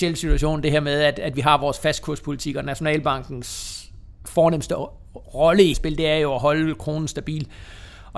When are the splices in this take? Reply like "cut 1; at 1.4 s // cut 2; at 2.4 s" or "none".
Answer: cut 1; at 5.7 s